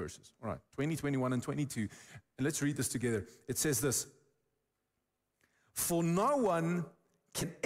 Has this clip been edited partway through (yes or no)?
no